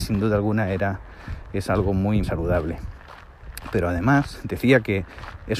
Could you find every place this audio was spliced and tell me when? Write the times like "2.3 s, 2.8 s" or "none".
2.2 s